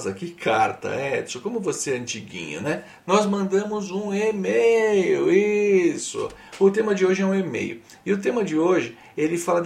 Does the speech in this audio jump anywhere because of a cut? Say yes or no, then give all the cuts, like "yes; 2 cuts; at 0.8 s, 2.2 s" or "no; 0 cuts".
no; 0 cuts